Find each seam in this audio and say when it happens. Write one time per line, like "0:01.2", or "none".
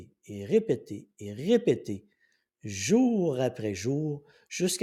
none